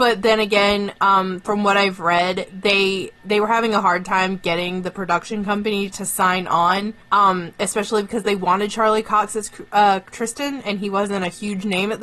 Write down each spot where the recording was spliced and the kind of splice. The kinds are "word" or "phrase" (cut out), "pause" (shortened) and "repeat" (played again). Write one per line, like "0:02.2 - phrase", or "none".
0:07.0 - pause